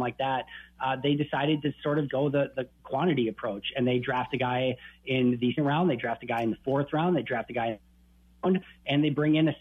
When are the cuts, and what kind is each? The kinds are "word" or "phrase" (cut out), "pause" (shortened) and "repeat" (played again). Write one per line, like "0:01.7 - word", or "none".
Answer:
0:02.1 - word
0:05.6 - word

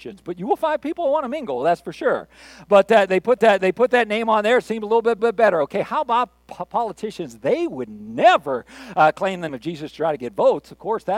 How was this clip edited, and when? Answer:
0:03.4 - repeat
0:05.2 - repeat
0:09.5 - word

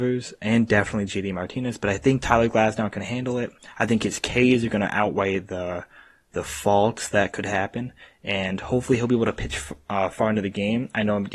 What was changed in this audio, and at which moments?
none

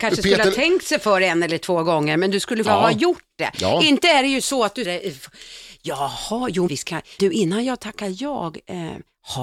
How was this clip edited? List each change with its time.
0:02.6 - word
0:04.8 - word
0:06.7 - word
0:07.2 - word

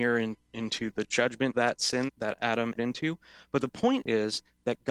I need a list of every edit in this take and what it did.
0:01.5 - word
0:02.1 - word
0:02.8 - word

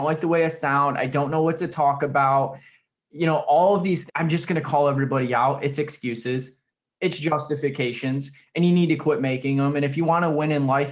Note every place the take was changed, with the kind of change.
0:04.1 - word

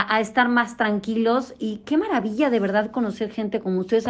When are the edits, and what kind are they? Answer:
none

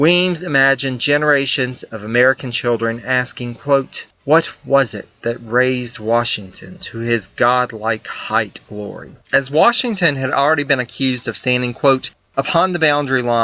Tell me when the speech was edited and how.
0:04.1 - pause
0:08.7 - word
0:09.2 - pause

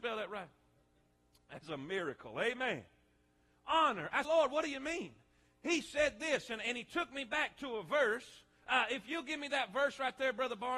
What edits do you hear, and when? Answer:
0:04.2 - word

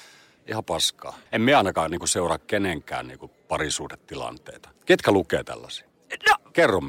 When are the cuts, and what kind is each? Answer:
0:01.3 - pause
0:04.8 - pause

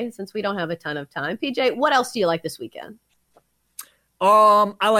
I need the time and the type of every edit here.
none

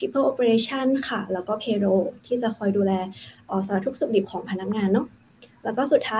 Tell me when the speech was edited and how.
0:05.2 - pause

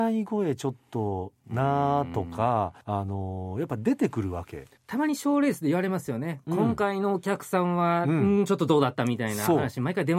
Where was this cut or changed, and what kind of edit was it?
0:02.8 - pause
0:04.8 - pause

